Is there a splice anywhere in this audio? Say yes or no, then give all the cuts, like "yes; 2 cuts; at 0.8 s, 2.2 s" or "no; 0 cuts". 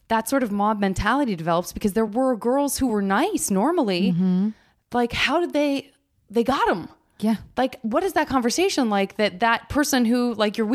no; 0 cuts